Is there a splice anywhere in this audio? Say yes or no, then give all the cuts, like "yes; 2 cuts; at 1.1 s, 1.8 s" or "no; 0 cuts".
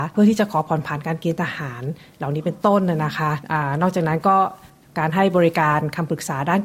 no; 0 cuts